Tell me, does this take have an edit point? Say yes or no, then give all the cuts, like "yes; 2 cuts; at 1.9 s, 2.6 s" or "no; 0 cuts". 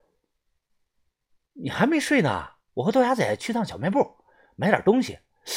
no; 0 cuts